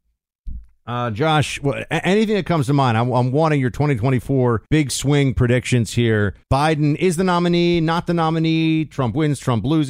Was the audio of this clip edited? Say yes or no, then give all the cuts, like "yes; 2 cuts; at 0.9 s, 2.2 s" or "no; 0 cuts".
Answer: yes; 2 cuts; at 4.7 s, 6.4 s